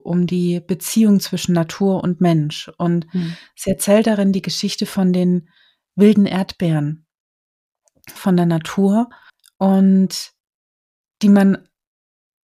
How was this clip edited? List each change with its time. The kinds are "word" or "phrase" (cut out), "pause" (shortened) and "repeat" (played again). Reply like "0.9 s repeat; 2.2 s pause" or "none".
8.2 s phrase; 9.3 s pause